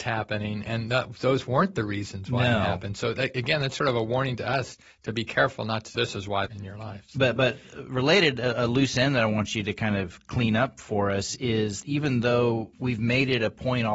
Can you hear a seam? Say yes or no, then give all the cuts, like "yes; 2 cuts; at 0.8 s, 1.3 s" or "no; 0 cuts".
yes; 4 cuts; at 5.9 s, 6.5 s, 11.8 s, 12.7 s